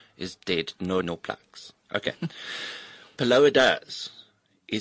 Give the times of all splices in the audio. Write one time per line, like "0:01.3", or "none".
0:01.0
0:03.2